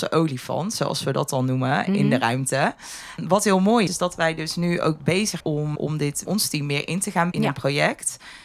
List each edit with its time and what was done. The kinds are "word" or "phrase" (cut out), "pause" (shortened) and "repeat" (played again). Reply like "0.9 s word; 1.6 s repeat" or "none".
3.9 s word; 5.4 s word; 5.8 s word; 6.3 s word; 7.3 s word